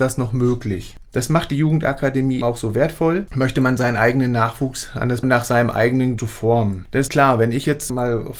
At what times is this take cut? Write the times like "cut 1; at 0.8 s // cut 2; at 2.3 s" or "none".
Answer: cut 1; at 2.4 s // cut 2; at 5.2 s // cut 3; at 6.2 s // cut 4; at 7.1 s